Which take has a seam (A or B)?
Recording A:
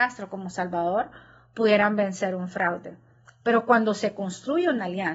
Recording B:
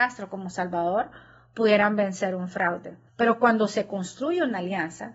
B